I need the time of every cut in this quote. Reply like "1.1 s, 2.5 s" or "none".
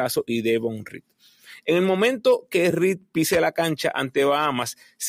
none